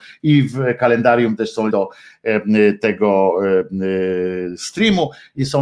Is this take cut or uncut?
cut